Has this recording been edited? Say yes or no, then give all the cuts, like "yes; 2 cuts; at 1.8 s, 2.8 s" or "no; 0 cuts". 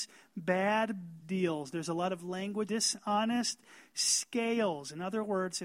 yes; 2 cuts; at 1.2 s, 2.7 s